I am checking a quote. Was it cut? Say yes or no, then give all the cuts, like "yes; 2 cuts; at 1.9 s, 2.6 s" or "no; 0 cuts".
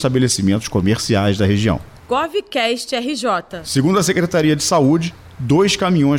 no; 0 cuts